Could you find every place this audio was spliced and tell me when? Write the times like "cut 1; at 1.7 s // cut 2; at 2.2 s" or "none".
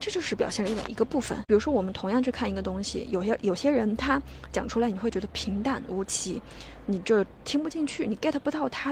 none